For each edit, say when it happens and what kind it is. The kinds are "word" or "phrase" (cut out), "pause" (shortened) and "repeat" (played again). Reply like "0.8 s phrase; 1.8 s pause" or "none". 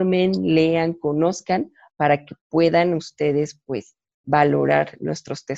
none

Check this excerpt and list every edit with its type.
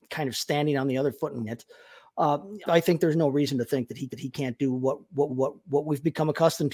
1.5 s word; 2.7 s word; 4.1 s repeat; 5.3 s repeat

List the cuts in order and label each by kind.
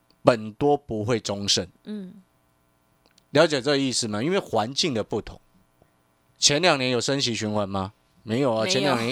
none

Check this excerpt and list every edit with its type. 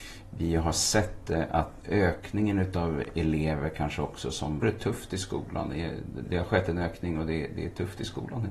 1.8 s word; 4.6 s word; 6.2 s word

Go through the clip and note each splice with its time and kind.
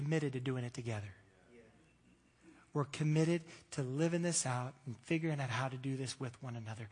none

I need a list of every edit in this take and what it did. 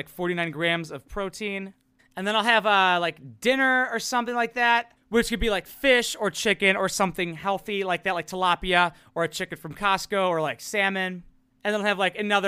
none

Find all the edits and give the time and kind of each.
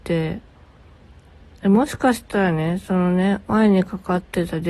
3.4 s pause

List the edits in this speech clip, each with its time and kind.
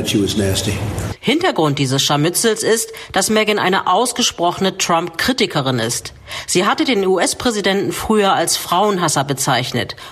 none

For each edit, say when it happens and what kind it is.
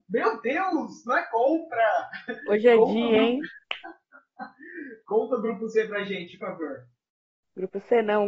6.4 s word

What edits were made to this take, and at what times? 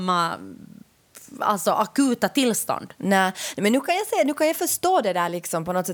none

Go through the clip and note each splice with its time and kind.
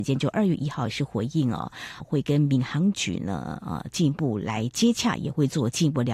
2.0 s word

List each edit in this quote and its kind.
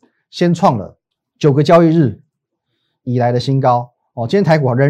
1.1 s pause

